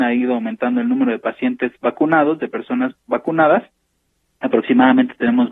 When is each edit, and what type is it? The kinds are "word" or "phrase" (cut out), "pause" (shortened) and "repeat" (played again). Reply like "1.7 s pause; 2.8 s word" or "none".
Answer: none